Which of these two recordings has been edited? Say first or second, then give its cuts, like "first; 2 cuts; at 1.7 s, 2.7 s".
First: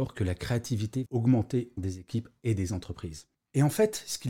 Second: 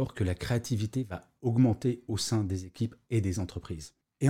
first; 2 cuts; at 1.1 s, 1.8 s